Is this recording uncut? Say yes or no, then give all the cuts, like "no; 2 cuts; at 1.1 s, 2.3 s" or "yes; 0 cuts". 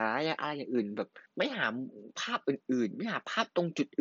no; 1 cut; at 1.3 s